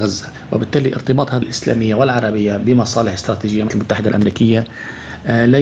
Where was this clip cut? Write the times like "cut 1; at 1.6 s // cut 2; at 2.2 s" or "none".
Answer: cut 1; at 1.4 s // cut 2; at 3.7 s